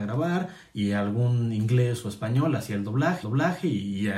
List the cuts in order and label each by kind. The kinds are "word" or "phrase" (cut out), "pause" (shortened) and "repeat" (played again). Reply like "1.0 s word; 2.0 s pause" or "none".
3.2 s repeat